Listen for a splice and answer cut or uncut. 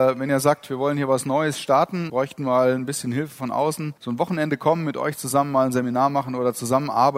cut